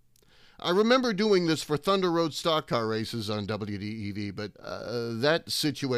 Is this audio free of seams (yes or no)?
no